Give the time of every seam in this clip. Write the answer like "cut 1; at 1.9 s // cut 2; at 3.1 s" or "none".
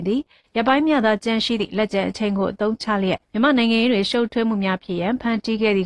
cut 1; at 3.2 s